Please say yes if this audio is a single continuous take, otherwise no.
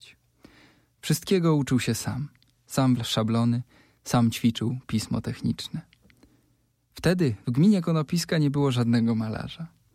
no